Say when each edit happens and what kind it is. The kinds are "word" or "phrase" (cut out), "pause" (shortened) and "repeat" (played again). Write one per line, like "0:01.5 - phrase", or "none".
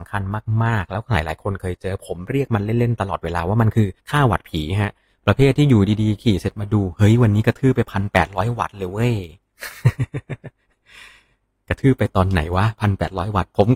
0:04.0 - pause